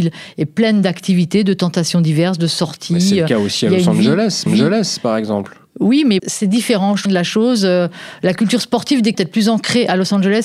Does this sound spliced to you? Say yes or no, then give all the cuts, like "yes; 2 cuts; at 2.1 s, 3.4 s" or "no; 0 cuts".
yes; 4 cuts; at 4.5 s, 6.2 s, 7.1 s, 9.1 s